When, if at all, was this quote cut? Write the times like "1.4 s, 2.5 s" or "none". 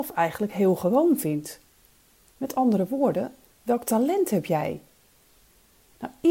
none